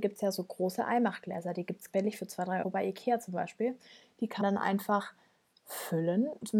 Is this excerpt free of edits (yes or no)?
no